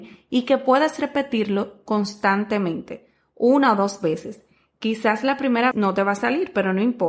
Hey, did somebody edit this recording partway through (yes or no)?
yes